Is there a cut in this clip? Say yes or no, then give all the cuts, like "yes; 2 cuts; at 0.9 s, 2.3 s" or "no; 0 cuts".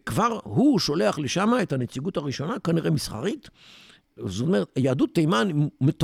no; 0 cuts